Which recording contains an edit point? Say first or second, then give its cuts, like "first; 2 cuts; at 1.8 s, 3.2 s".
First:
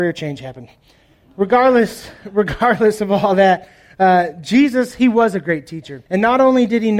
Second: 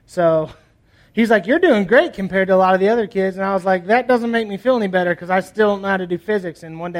first; 1 cut; at 6.1 s